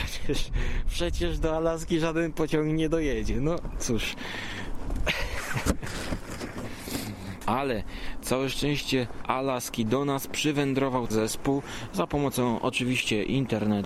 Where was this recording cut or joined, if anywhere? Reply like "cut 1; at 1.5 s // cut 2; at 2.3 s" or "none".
cut 1; at 9.2 s // cut 2; at 11.1 s